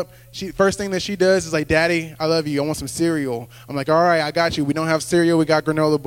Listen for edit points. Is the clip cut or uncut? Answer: uncut